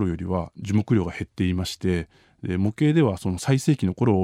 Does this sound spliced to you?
no; 0 cuts

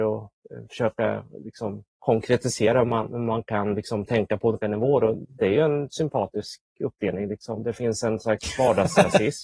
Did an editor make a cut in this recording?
yes; 1 cut; at 1.9 s

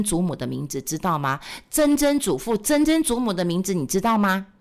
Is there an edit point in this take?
no; 0 cuts

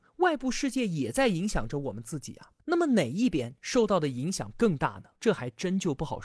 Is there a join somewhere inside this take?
yes; 2 cuts; at 2.6 s, 5.2 s

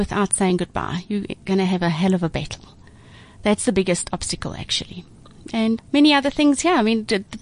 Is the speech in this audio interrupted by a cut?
yes; 1 cut; at 5.8 s

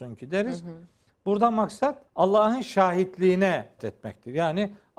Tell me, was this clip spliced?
yes; 2 cuts; at 2.1 s, 3.8 s

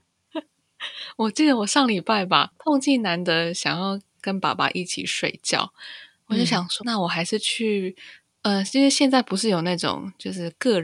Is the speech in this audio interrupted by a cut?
yes; 1 cut; at 6.8 s

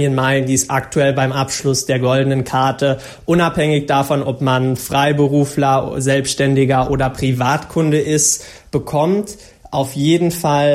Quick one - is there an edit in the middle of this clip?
no; 0 cuts

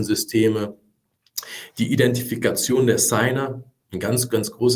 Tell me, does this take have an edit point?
no; 0 cuts

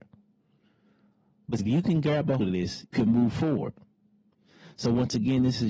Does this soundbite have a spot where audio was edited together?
yes; 3 cuts; at 1.6 s, 2.4 s, 2.9 s

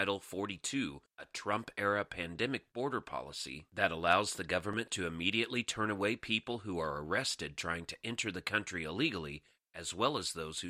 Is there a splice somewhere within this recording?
no; 0 cuts

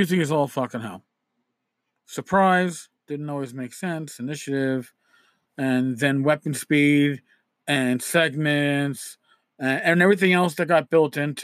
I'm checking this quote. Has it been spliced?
yes; 1 cut; at 3.0 s

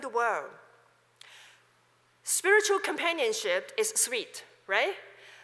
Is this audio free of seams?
yes; 0 cuts

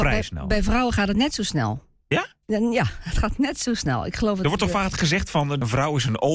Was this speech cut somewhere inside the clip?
no; 0 cuts

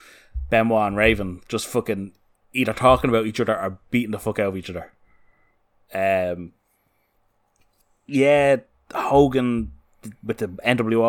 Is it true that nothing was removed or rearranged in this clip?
yes; 0 cuts

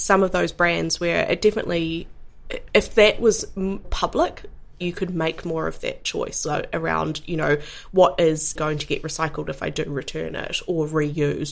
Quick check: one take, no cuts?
no; 2 cuts; at 3.8 s, 8.6 s

